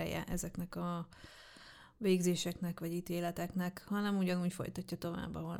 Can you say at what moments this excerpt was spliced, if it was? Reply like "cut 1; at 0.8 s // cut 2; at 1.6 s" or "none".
none